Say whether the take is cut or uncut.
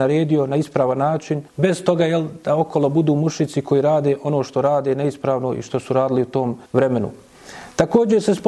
cut